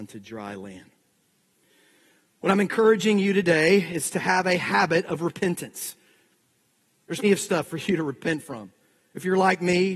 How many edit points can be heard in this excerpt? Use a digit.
1